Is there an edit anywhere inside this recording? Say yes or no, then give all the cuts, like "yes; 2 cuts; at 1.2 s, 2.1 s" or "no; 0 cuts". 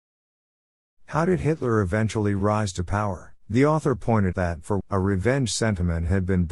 yes; 3 cuts; at 3.4 s, 4.3 s, 4.8 s